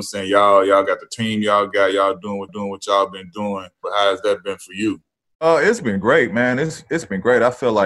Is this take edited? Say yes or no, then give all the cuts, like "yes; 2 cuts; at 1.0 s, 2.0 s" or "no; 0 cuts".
yes; 1 cut; at 2.5 s